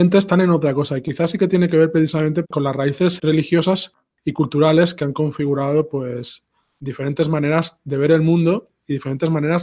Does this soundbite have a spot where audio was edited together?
yes; 2 cuts; at 2.4 s, 3.2 s

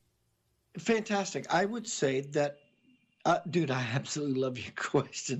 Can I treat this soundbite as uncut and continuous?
yes; 0 cuts

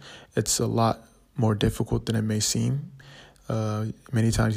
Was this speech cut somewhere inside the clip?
no; 0 cuts

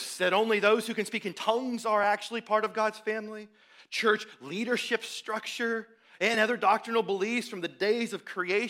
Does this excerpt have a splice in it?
no; 0 cuts

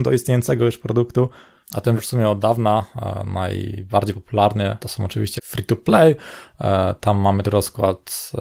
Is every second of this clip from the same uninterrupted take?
no; 4 cuts; at 2.0 s, 4.8 s, 5.4 s, 7.4 s

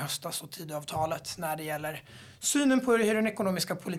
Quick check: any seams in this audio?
no; 0 cuts

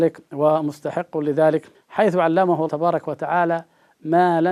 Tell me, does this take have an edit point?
yes; 2 cuts; at 1.7 s, 2.7 s

